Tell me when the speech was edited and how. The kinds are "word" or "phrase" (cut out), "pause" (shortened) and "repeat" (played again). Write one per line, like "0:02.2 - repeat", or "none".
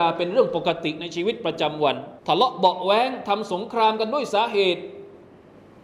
0:02.2 - pause